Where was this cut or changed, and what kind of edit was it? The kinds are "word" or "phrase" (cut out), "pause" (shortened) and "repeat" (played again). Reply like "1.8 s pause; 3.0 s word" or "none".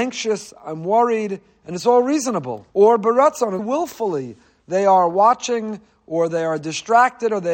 2.7 s pause; 3.6 s word